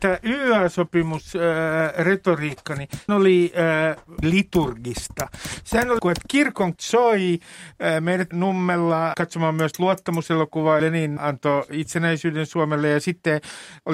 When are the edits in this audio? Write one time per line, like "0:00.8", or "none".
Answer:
0:03.1
0:04.2
0:06.0
0:06.8
0:08.3
0:09.1
0:10.8
0:11.2